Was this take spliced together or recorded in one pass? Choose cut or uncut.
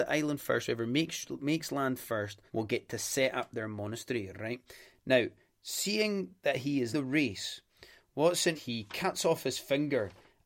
cut